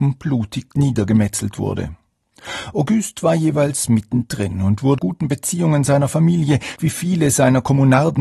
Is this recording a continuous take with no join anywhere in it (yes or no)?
no